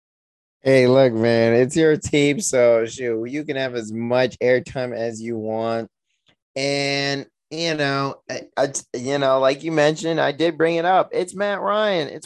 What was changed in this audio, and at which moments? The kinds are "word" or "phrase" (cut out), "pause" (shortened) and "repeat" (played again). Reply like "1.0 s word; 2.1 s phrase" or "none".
8.5 s word